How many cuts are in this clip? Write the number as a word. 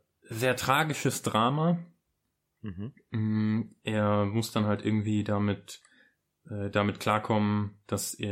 zero